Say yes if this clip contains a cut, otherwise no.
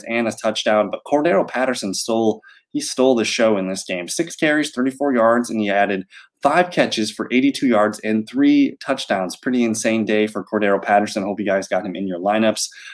no